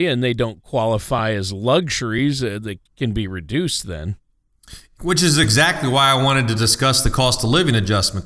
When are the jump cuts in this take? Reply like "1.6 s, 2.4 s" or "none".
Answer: 2.9 s